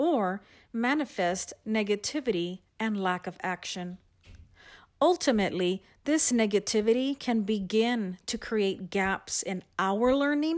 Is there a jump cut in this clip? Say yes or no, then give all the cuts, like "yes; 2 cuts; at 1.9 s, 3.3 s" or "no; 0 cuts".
no; 0 cuts